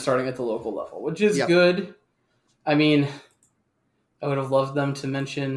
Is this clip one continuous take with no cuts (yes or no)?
yes